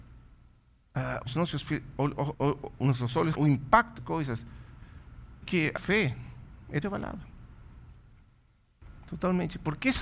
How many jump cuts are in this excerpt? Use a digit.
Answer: 7